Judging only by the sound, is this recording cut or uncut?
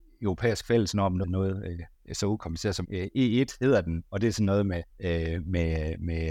cut